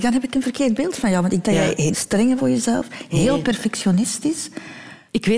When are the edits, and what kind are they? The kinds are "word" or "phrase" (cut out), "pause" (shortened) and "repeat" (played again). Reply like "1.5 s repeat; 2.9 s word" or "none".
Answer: 1.4 s word; 1.9 s word; 2.4 s word